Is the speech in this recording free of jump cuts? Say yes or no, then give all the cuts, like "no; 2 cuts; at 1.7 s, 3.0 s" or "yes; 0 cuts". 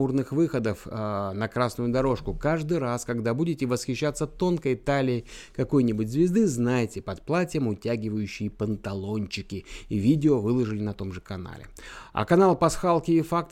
yes; 0 cuts